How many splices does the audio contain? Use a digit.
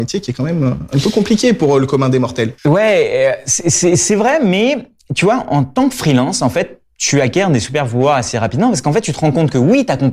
1